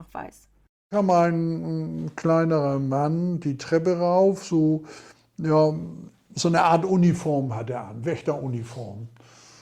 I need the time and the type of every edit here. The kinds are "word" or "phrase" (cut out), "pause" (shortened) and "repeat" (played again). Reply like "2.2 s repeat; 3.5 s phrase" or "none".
none